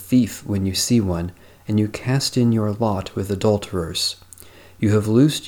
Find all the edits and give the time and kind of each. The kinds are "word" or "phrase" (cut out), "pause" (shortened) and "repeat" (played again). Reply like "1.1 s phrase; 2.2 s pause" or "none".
none